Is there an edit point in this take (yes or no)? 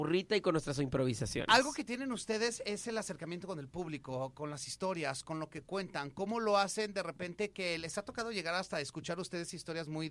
no